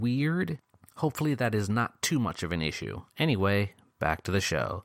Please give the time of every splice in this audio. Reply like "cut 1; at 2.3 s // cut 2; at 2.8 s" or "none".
cut 1; at 3.1 s

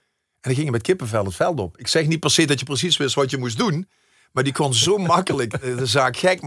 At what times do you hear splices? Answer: none

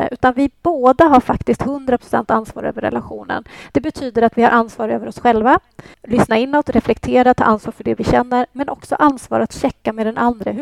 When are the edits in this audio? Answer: cut 1; at 5.9 s

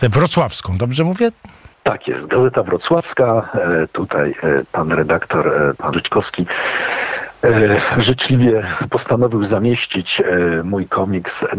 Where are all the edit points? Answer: cut 1; at 1.7 s // cut 2; at 4.7 s // cut 3; at 5.9 s

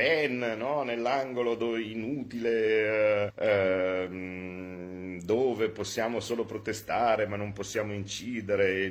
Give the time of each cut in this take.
cut 1; at 3.3 s

